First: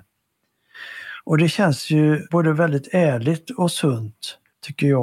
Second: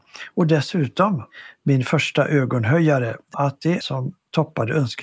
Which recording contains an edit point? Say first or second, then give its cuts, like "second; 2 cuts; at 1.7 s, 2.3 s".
second; 2 cuts; at 3.3 s, 3.8 s